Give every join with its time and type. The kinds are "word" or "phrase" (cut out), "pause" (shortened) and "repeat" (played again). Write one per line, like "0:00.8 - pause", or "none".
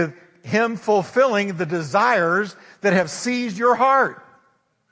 none